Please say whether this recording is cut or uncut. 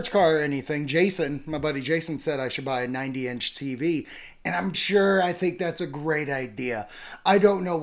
cut